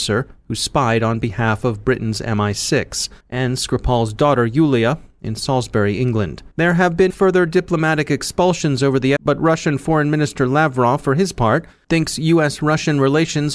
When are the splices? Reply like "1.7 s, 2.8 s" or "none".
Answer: 3.2 s, 6.5 s, 7.1 s, 9.2 s